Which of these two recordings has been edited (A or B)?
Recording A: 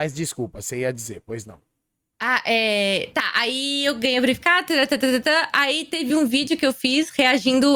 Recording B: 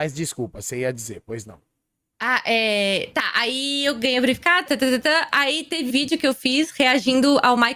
B